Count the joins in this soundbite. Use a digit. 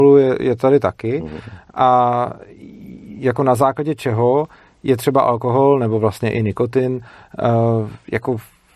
0